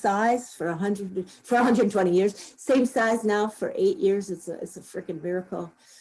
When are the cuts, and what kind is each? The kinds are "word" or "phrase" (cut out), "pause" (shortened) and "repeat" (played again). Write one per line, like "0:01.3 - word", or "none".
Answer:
none